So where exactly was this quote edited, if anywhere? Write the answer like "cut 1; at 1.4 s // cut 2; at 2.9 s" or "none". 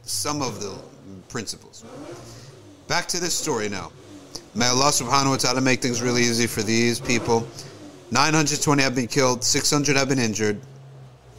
none